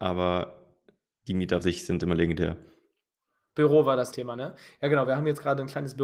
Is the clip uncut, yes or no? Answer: no